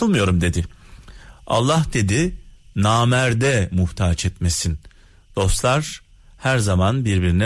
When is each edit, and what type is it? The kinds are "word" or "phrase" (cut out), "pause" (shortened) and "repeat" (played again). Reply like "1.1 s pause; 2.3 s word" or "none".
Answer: none